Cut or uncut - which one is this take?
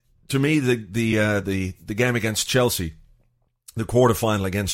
uncut